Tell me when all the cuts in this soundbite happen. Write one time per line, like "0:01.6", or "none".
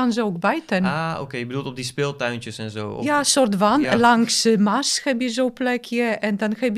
none